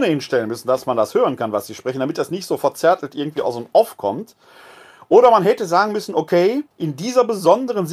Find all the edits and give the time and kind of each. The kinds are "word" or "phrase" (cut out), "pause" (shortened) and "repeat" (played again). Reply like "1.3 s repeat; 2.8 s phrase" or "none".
6.7 s pause

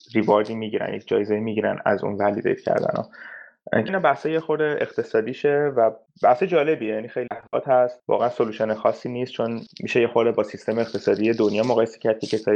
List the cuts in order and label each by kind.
3.9 s word; 7.3 s word

